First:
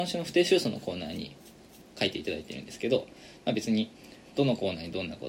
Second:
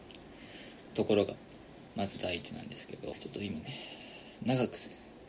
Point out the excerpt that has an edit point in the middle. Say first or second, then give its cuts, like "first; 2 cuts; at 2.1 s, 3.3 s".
second; 1 cut; at 3.1 s